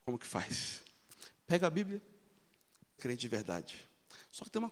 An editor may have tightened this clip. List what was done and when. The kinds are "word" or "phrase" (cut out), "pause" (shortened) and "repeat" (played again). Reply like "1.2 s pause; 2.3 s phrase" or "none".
3.0 s phrase